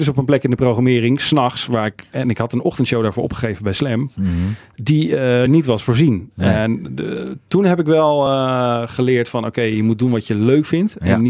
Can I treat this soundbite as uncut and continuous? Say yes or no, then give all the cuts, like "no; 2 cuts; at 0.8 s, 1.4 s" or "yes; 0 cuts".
yes; 0 cuts